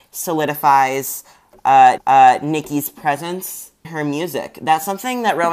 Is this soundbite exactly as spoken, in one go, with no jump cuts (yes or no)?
no